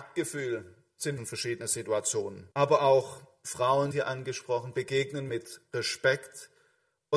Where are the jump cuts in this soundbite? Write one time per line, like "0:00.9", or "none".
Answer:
0:01.2
0:02.5
0:03.9
0:05.3